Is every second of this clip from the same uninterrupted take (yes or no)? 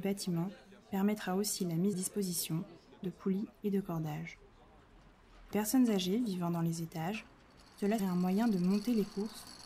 no